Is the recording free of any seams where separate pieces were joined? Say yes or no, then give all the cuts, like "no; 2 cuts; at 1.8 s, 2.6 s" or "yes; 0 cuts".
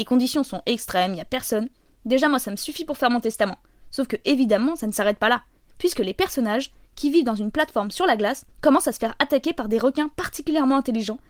no; 1 cut; at 8.5 s